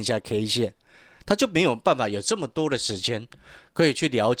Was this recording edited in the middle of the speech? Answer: no; 0 cuts

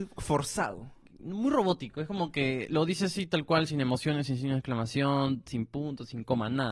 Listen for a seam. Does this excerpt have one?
no; 0 cuts

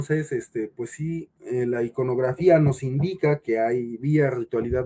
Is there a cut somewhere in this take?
yes; 1 cut; at 1.3 s

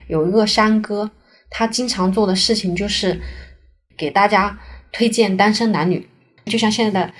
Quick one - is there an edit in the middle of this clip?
no; 0 cuts

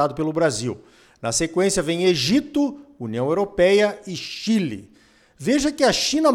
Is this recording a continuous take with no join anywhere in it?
yes; 0 cuts

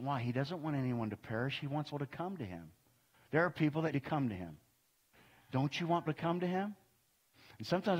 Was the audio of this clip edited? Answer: yes; 3 cuts; at 1.9 s, 3.9 s, 6.1 s

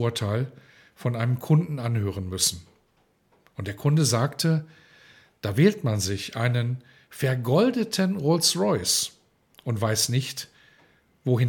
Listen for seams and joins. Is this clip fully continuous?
yes; 0 cuts

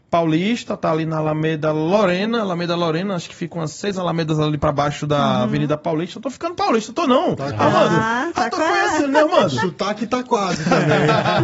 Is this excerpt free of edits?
yes; 0 cuts

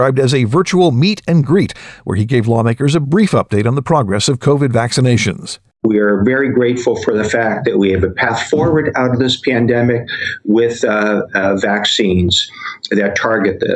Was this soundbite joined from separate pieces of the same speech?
no; 0 cuts

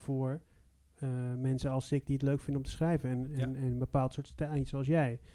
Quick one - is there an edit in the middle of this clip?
no; 0 cuts

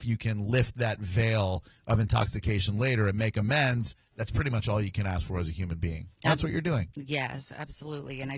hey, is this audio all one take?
yes; 0 cuts

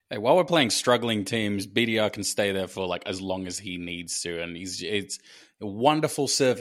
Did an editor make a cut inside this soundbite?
no; 0 cuts

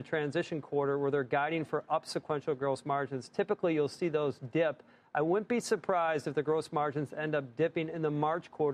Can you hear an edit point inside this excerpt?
no; 0 cuts

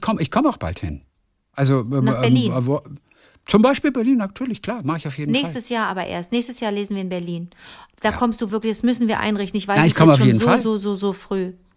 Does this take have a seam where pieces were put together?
no; 0 cuts

